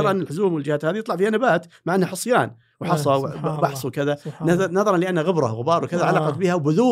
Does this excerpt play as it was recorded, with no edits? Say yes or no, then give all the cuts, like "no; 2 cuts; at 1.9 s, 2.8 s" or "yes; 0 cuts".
yes; 0 cuts